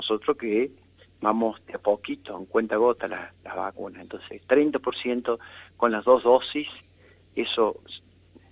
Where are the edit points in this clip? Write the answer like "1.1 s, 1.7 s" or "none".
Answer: 7.3 s